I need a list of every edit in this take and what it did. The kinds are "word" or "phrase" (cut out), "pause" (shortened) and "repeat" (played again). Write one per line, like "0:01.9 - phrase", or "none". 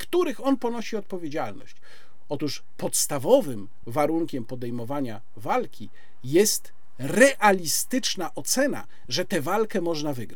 none